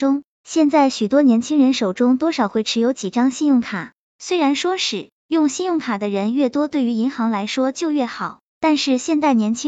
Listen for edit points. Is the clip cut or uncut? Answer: cut